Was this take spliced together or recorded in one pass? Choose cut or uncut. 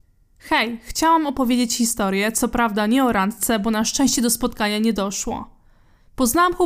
uncut